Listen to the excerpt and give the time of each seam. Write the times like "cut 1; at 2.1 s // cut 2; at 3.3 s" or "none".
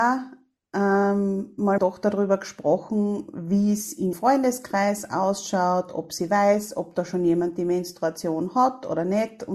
cut 1; at 1.8 s // cut 2; at 4.1 s